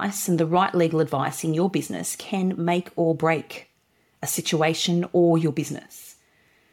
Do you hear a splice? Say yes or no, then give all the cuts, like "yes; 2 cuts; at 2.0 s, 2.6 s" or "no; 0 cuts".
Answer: no; 0 cuts